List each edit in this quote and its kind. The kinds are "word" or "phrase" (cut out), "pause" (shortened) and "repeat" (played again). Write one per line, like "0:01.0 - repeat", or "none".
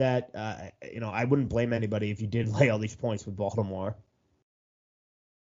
none